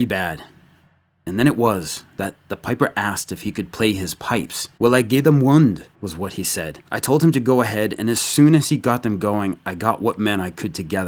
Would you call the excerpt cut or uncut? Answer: cut